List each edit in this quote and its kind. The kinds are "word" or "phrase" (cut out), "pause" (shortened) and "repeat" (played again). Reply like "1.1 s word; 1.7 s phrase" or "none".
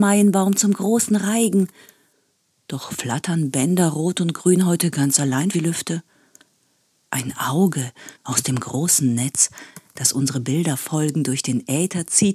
5.5 s phrase; 8.1 s pause